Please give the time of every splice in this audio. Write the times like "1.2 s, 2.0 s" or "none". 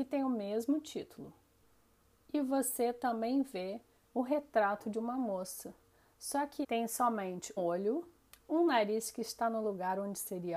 6.6 s, 7.6 s